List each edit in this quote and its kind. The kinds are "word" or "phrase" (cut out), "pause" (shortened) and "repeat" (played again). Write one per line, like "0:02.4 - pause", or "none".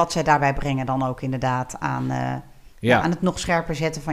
0:02.7 - pause